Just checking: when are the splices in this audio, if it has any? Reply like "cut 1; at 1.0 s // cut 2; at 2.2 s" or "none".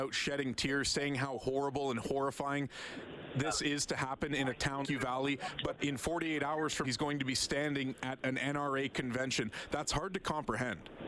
cut 1; at 4.8 s // cut 2; at 5.8 s // cut 3; at 6.8 s